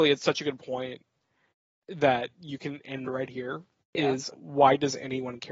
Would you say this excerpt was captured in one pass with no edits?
no; 3 cuts; at 3.0 s, 3.8 s, 4.3 s

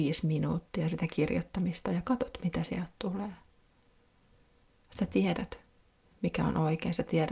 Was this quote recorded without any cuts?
yes; 0 cuts

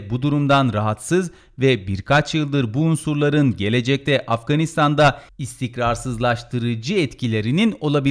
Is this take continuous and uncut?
yes; 0 cuts

